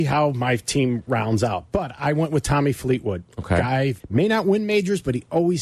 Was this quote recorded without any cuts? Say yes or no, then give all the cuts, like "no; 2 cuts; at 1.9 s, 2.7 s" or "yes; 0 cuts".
no; 1 cut; at 4.0 s